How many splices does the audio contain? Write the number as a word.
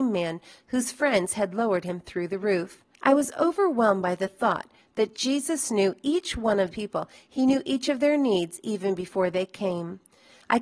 two